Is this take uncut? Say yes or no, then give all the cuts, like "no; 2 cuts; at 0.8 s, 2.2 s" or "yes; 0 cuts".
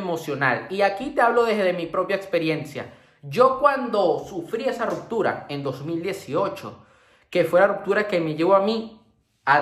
yes; 0 cuts